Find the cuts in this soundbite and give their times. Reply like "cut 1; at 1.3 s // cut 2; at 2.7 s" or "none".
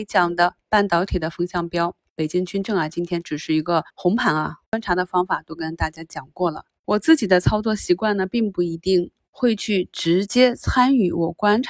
cut 1; at 3.9 s